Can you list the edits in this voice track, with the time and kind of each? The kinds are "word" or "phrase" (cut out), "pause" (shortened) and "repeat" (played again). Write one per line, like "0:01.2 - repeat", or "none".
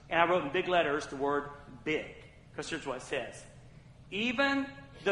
none